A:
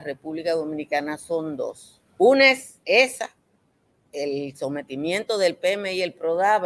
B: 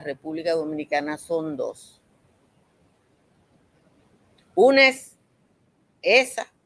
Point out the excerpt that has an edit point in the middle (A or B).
A